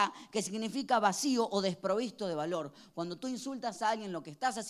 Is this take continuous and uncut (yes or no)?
yes